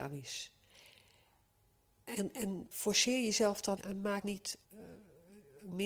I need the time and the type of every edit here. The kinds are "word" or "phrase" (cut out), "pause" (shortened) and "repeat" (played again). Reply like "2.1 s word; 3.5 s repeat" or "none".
2.7 s word; 3.8 s word; 4.2 s word; 4.6 s pause

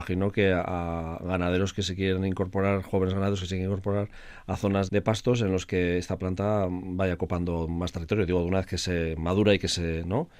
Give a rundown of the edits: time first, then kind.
4.9 s word

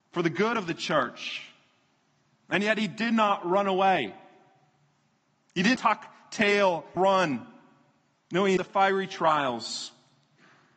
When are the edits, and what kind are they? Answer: 5.7 s word; 7.0 s word; 8.6 s word

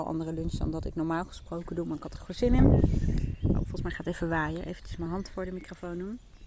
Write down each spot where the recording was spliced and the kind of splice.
none

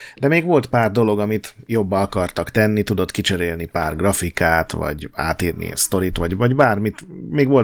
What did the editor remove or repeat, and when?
none

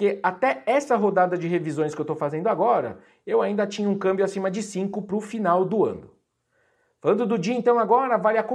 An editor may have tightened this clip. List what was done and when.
none

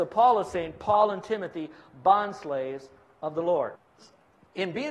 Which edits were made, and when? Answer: none

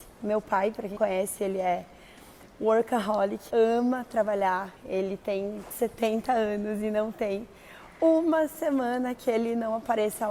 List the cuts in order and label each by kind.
1.0 s word; 3.5 s word; 4.8 s pause; 5.7 s word

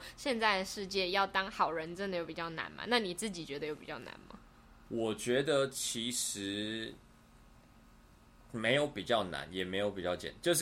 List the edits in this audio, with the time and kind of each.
none

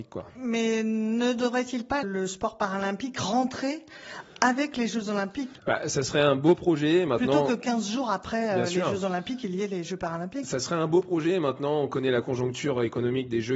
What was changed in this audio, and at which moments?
2.0 s word

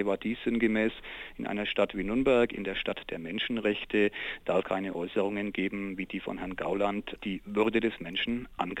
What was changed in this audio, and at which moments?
4.6 s word; 7.2 s word

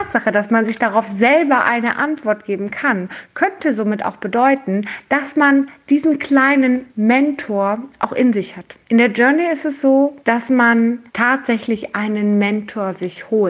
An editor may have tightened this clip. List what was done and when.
6.9 s pause; 8.8 s pause; 10.2 s pause; 11.1 s pause

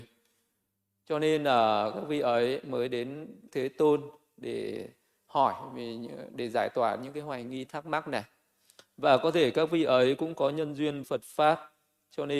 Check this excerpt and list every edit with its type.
3.5 s word; 11.0 s word

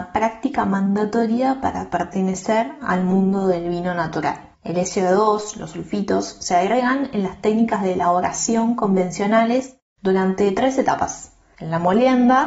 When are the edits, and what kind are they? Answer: 4.5 s pause

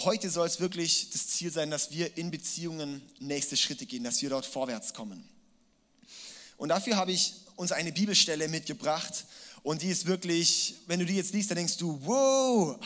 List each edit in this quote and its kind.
none

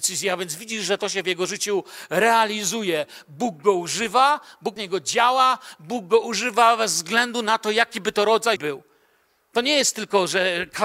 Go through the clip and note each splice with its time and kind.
4.8 s word; 8.6 s word

